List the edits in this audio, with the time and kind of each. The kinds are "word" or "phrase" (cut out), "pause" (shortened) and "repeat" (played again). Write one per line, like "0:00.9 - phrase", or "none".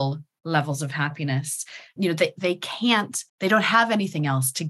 0:02.0 - word
0:03.3 - pause